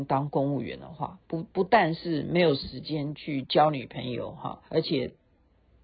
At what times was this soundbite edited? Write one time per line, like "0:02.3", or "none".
0:01.2
0:04.7